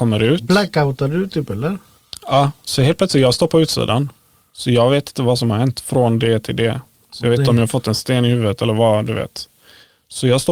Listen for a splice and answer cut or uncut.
uncut